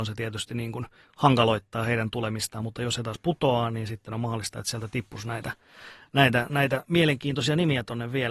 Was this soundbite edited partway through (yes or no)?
no